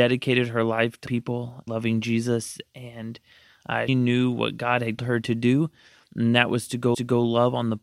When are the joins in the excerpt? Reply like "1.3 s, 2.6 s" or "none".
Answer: 1.1 s, 1.7 s, 3.9 s, 5.0 s, 6.9 s